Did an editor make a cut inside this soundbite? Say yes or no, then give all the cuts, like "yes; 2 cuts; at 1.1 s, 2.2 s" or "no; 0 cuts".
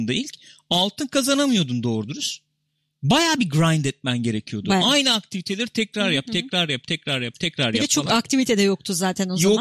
no; 0 cuts